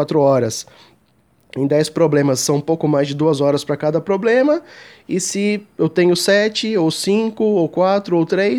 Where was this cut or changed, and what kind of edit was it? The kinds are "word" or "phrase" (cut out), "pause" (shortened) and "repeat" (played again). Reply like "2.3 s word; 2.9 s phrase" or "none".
none